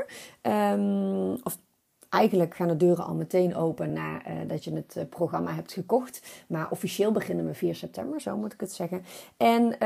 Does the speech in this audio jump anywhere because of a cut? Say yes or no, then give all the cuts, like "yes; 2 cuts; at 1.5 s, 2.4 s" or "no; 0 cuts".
no; 0 cuts